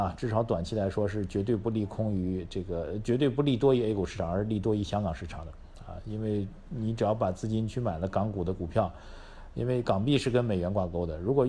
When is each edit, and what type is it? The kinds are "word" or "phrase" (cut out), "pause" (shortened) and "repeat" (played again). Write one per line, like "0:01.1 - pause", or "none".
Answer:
none